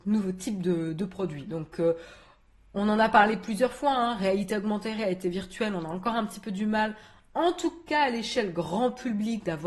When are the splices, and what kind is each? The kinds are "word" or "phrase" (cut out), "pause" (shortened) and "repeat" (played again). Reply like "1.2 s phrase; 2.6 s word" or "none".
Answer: none